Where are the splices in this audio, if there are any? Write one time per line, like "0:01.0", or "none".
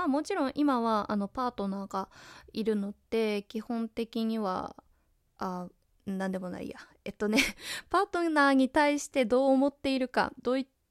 none